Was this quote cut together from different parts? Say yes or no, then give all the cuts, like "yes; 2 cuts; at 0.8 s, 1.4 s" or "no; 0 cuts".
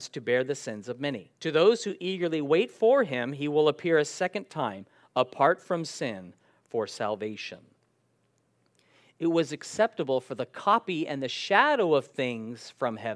yes; 1 cut; at 1.4 s